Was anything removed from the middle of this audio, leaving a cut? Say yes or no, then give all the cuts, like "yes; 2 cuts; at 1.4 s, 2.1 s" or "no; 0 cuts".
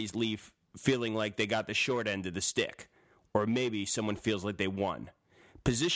no; 0 cuts